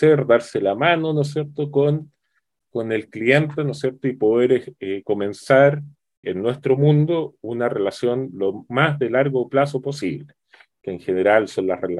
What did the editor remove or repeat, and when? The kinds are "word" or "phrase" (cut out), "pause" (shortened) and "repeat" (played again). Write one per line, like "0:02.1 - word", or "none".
0:06.2 - word